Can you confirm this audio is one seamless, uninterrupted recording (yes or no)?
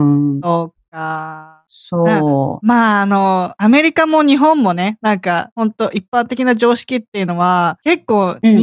yes